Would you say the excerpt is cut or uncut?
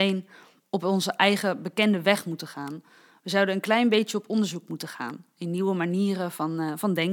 uncut